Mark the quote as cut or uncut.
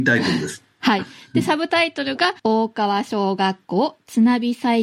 cut